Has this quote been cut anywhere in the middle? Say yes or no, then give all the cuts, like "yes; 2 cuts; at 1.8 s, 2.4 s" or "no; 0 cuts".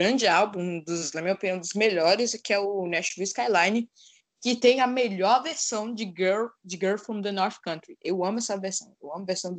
no; 0 cuts